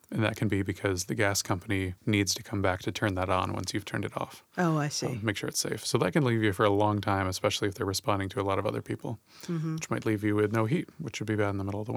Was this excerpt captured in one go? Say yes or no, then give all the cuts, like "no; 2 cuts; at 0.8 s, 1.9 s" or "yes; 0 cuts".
no; 2 cuts; at 2.0 s, 10.9 s